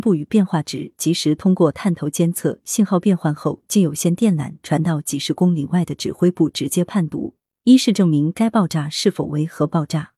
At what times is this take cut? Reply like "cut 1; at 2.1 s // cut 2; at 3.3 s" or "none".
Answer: none